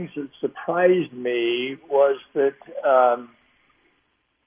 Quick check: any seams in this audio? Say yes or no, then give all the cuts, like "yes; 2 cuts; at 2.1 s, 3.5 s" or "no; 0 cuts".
no; 0 cuts